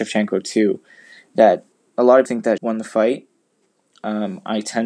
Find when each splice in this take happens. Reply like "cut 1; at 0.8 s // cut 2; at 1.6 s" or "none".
cut 1; at 1.7 s // cut 2; at 2.3 s // cut 3; at 2.6 s